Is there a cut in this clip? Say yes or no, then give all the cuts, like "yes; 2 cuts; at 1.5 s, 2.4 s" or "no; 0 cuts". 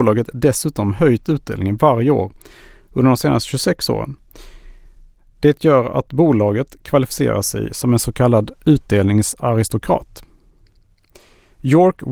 no; 0 cuts